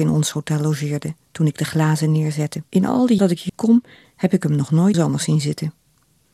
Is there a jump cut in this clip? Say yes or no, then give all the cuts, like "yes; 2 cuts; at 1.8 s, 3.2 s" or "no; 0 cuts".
yes; 4 cuts; at 2.7 s, 3.2 s, 3.5 s, 4.9 s